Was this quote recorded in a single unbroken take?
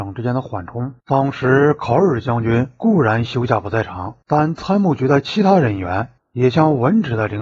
no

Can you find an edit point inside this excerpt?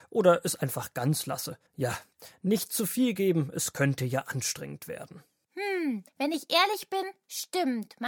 yes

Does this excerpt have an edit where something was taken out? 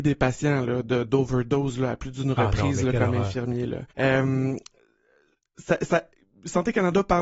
yes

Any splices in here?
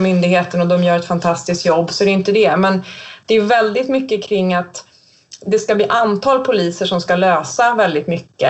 no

